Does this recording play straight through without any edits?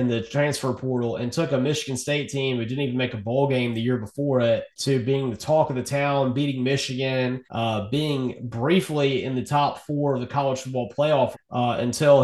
no; 3 cuts; at 4.7 s, 7.4 s, 11.3 s

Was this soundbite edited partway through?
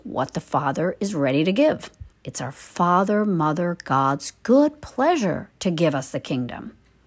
yes; 1 cut; at 2.1 s

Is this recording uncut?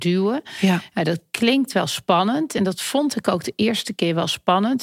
yes; 0 cuts

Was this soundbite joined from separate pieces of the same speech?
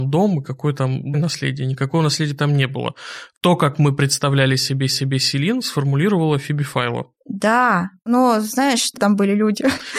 yes; 3 cuts; at 1.1 s, 4.9 s, 9.0 s

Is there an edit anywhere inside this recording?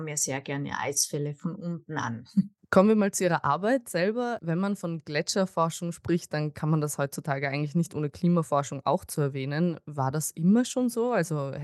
no; 0 cuts

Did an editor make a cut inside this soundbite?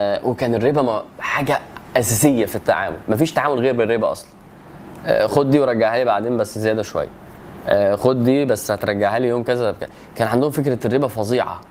yes; 1 cut; at 1.1 s

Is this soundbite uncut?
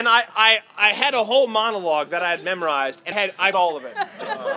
no; 2 cuts; at 3.1 s, 3.5 s

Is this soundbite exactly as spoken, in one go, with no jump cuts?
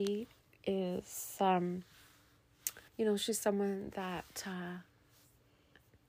no; 1 cut; at 2.9 s

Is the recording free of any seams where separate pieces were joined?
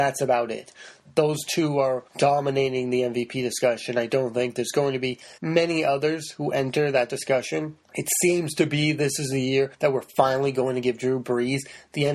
no; 4 cuts; at 2.1 s, 5.4 s, 7.8 s, 9.7 s

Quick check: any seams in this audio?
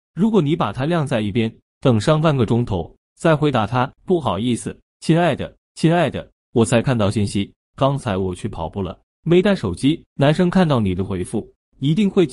yes; 3 cuts; at 4.0 s, 5.7 s, 10.1 s

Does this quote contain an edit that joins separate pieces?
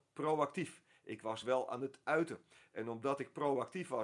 no; 0 cuts

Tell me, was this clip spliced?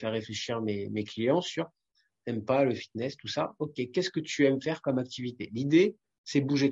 no; 0 cuts

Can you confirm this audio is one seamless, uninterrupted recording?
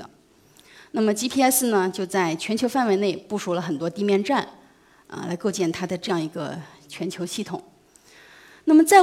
yes; 0 cuts

